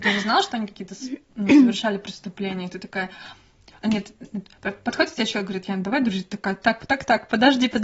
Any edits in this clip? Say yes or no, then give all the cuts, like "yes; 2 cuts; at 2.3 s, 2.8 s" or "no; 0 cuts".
no; 0 cuts